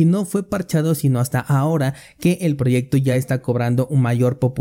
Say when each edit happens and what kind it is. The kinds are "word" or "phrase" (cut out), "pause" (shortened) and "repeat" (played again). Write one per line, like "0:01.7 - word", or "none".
none

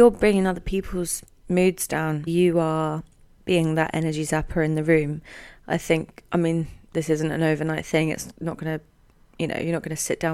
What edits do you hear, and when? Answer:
0:02.3 - word

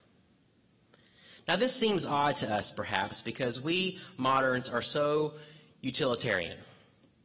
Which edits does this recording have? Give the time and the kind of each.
none

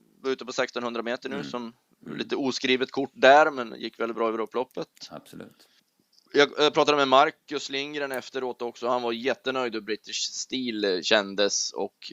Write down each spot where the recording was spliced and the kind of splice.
none

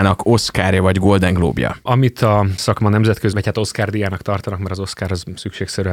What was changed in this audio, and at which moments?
0:02.6 - word
0:03.3 - word

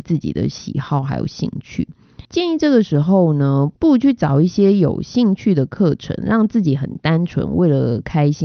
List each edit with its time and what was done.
0:02.2 - pause
0:03.7 - pause

